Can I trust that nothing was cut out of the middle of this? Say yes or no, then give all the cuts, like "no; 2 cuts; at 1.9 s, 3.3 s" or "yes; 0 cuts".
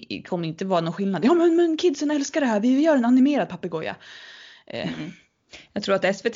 yes; 0 cuts